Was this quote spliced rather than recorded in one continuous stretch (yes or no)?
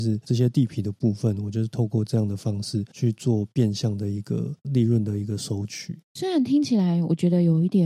yes